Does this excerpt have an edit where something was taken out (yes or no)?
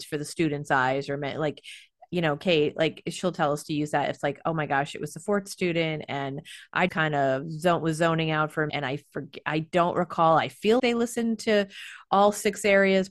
yes